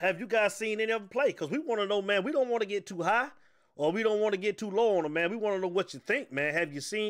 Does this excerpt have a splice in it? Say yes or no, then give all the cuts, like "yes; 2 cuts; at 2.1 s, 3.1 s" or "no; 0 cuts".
no; 0 cuts